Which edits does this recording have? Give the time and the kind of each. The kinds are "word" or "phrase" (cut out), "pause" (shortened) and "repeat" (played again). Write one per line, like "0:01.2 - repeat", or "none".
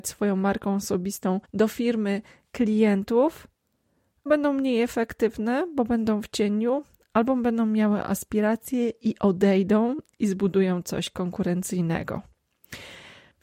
0:01.4 - pause
0:04.3 - word